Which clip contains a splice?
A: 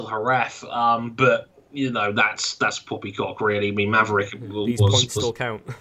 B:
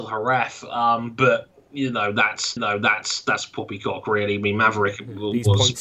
B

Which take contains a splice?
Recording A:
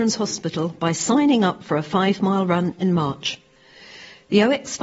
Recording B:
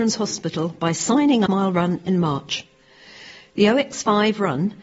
B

